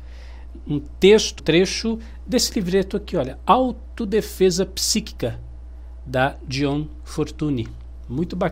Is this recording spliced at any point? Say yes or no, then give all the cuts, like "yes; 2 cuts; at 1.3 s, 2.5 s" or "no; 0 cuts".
yes; 1 cut; at 1.4 s